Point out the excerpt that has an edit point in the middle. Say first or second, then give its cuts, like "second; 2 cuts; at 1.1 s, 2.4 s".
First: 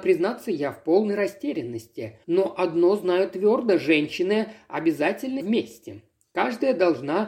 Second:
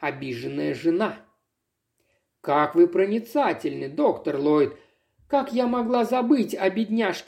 first; 2 cuts; at 2.2 s, 5.4 s